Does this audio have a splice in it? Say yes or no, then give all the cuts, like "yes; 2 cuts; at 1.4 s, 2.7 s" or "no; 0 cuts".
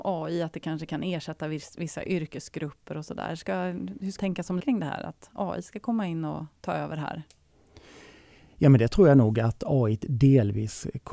yes; 2 cuts; at 4.2 s, 4.6 s